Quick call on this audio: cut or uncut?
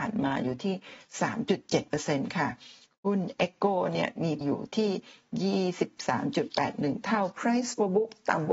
cut